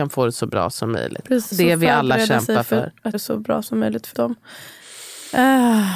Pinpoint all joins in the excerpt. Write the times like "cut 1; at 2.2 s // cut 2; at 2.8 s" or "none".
cut 1; at 1.5 s // cut 2; at 3.1 s // cut 3; at 4.1 s

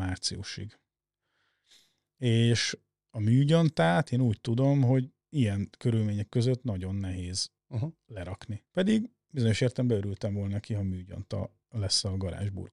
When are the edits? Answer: cut 1; at 5.2 s // cut 2; at 7.6 s // cut 3; at 8.7 s // cut 4; at 11.6 s

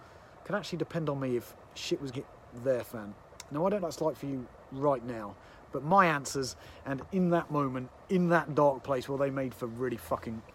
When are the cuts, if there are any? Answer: cut 1; at 2.1 s // cut 2; at 3.8 s

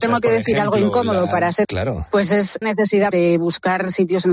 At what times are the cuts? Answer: cut 1; at 1.6 s // cut 2; at 2.6 s // cut 3; at 3.1 s

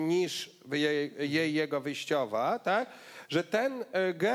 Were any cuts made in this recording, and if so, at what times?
none

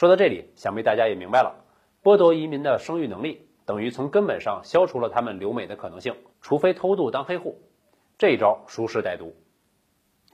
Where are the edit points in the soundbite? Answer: cut 1; at 6.3 s

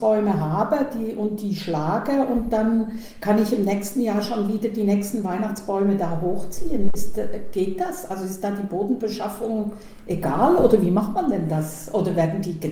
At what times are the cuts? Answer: none

